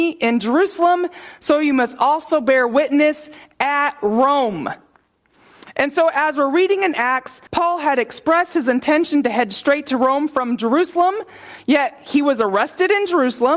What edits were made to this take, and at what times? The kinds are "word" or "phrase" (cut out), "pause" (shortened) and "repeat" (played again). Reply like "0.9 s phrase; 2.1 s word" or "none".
7.5 s pause